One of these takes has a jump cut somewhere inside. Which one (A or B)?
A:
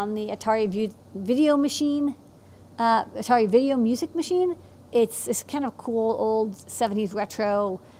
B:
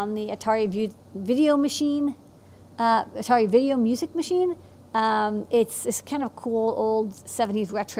A